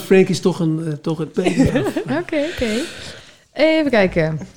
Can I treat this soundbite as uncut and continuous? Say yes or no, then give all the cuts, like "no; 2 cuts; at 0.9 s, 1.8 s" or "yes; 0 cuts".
no; 2 cuts; at 1.3 s, 1.7 s